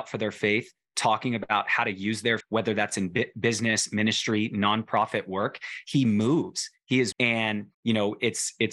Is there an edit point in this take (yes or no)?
yes